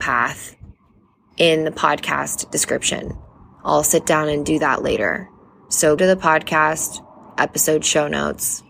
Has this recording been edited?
yes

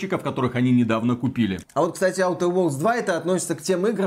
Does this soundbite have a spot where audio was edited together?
no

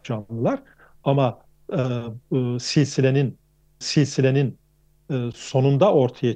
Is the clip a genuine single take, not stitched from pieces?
no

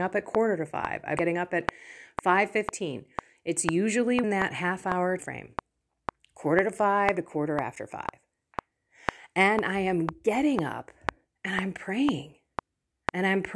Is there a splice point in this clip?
yes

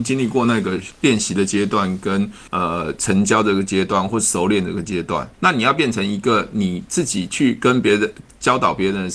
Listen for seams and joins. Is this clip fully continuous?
no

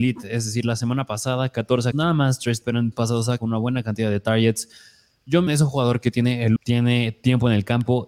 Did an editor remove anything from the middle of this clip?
yes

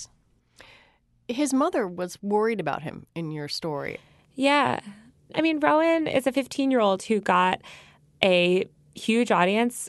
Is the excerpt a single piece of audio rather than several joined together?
yes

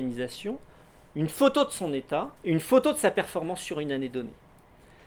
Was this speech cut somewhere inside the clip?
yes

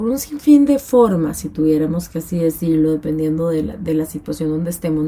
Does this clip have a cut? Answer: no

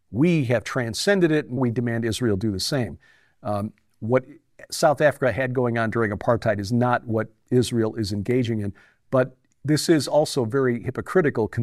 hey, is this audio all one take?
no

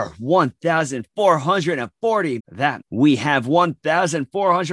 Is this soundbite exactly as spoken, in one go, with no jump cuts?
no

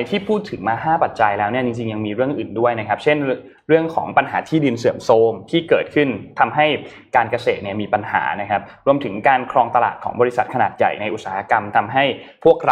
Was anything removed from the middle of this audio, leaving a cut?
no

